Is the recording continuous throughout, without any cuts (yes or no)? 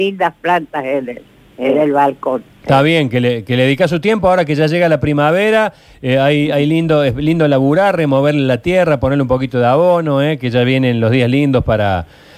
yes